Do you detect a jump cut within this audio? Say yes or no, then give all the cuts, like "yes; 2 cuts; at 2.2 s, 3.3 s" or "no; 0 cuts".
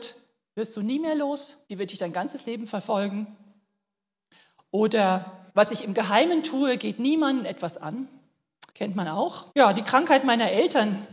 yes; 4 cuts; at 1.7 s, 5.5 s, 8.7 s, 9.5 s